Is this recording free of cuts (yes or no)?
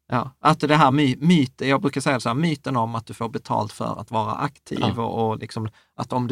yes